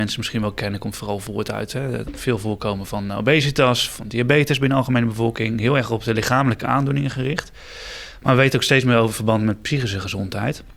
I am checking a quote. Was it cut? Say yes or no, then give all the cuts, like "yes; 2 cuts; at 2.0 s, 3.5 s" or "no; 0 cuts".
no; 0 cuts